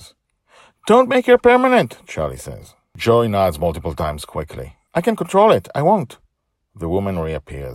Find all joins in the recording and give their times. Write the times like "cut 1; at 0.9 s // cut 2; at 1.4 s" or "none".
none